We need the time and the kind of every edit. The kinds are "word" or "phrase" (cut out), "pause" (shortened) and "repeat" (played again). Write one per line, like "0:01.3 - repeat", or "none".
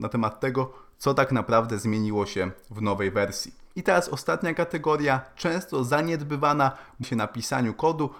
0:07.0 - phrase